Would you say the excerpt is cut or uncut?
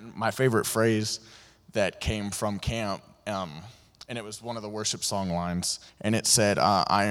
cut